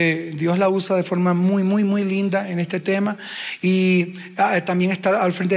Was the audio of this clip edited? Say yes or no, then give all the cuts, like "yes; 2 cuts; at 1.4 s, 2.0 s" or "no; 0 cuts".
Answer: no; 0 cuts